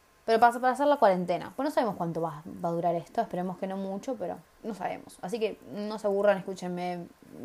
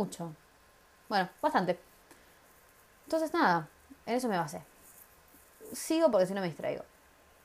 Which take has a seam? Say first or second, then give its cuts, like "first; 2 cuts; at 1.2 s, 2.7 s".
first; 1 cut; at 4.5 s